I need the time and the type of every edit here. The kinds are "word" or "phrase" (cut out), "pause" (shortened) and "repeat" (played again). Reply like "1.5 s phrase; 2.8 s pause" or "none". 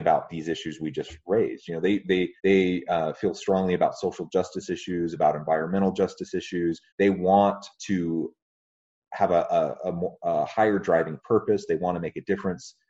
2.4 s pause; 6.9 s pause; 7.8 s pause

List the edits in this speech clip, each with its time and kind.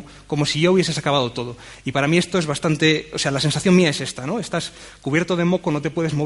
none

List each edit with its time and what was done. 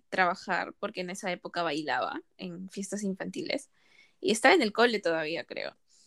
none

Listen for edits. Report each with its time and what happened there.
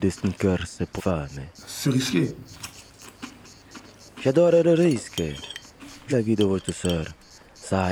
1.0 s word; 1.8 s phrase; 6.1 s word

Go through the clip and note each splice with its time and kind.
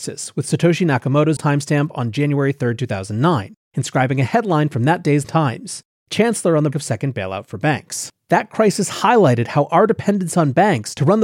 1.4 s word; 5.2 s word; 6.7 s word

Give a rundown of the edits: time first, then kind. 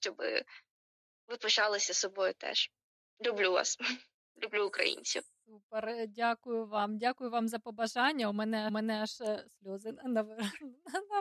8.7 s repeat

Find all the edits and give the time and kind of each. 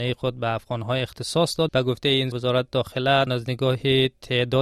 1.7 s word; 2.3 s word; 3.3 s phrase

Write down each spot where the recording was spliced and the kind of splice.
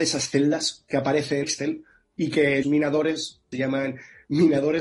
1.4 s word; 2.6 s word; 3.5 s word

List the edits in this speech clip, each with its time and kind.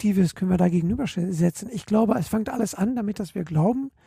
none

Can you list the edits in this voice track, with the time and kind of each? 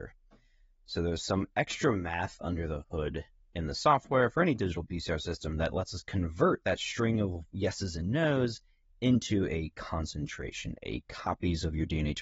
none

